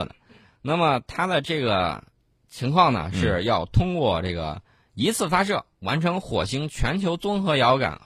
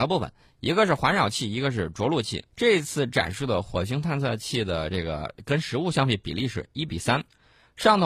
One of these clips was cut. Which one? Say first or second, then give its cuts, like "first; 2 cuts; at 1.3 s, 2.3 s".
second; 1 cut; at 2.5 s